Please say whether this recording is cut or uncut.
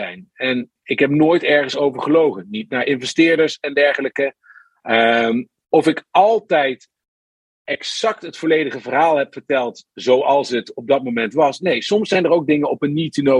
uncut